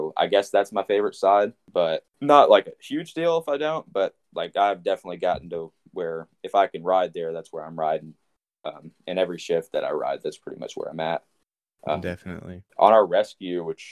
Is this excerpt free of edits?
yes; 0 cuts

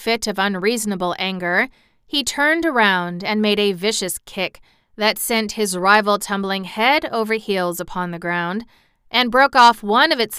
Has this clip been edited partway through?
no; 0 cuts

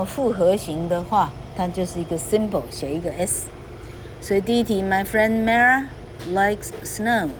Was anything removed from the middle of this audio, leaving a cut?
no; 0 cuts

